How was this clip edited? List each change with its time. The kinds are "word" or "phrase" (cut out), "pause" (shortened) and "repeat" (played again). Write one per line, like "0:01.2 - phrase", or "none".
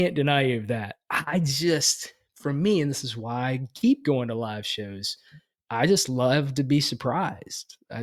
none